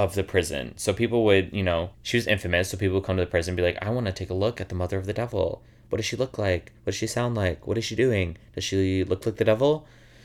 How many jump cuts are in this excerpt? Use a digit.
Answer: 2